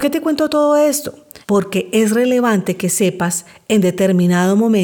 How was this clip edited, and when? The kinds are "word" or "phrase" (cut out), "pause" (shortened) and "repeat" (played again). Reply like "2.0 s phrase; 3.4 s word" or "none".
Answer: 1.4 s pause